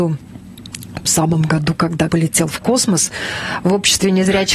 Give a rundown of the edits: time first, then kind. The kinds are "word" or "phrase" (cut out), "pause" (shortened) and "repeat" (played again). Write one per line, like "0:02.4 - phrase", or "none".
0:01.1 - word
0:02.1 - word